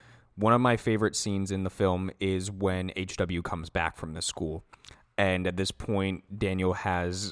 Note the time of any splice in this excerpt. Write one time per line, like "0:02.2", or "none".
none